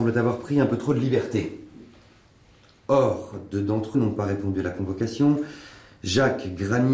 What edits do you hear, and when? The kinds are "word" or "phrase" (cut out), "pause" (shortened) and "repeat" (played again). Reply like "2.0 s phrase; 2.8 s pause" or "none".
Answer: 3.9 s word